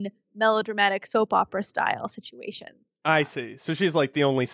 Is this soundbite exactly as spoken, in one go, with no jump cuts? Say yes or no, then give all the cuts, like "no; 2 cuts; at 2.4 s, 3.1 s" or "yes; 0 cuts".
yes; 0 cuts